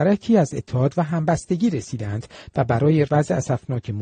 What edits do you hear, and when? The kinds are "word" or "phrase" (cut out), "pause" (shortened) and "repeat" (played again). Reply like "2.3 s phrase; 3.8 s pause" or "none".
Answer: 3.1 s phrase